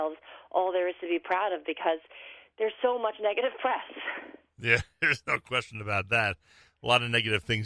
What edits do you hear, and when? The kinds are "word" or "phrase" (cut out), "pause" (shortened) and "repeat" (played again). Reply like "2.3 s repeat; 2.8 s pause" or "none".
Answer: none